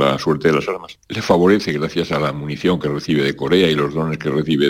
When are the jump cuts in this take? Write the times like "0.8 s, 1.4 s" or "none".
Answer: none

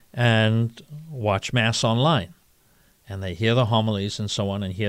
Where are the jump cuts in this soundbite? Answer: none

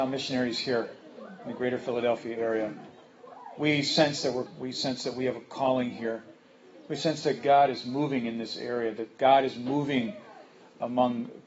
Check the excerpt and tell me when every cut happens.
4.5 s

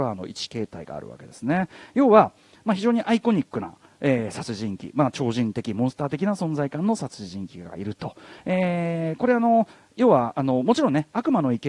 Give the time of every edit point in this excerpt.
none

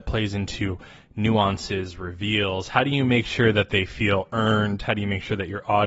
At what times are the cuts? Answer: none

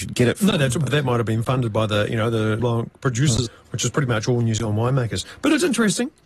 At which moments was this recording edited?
2.6 s, 3.5 s

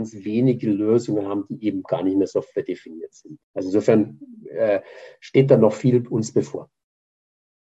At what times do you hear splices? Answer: 3.4 s

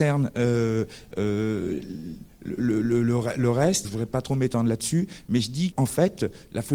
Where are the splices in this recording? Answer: 2.6 s, 3.8 s, 5.7 s

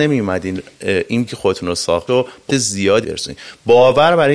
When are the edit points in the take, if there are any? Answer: 1.3 s, 2.1 s, 2.5 s, 3.0 s

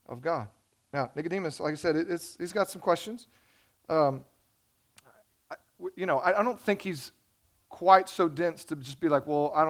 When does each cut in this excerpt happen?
none

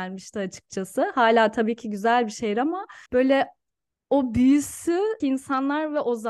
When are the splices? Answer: 3.1 s, 5.2 s

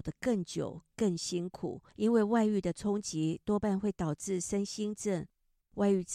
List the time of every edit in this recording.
1.9 s

